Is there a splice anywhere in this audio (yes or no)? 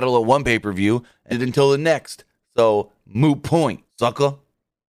yes